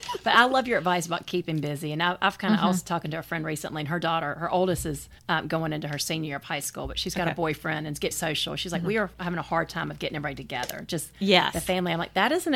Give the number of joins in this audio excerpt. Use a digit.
2